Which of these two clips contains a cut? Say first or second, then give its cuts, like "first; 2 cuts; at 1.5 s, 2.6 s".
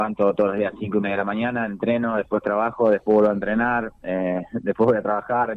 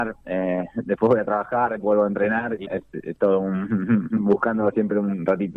second; 1 cut; at 2.6 s